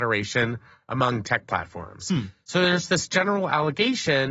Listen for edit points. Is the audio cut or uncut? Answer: cut